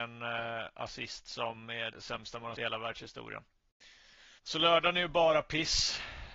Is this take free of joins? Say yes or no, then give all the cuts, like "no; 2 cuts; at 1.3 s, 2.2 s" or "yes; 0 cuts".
no; 3 cuts; at 1.9 s, 2.6 s, 4.4 s